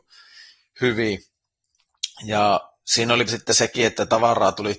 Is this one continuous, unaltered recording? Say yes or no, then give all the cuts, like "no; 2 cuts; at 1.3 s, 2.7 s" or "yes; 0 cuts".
no; 1 cut; at 3.3 s